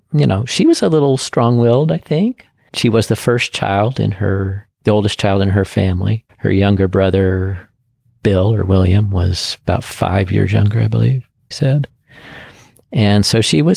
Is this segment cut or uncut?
cut